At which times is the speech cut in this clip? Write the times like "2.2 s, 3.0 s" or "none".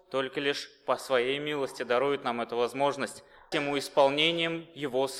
3.5 s